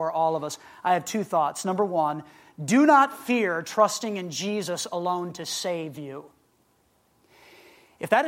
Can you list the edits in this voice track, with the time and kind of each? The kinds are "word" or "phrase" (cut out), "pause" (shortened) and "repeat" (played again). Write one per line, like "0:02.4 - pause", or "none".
none